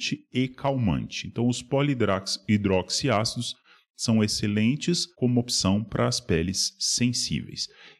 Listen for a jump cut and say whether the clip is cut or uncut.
cut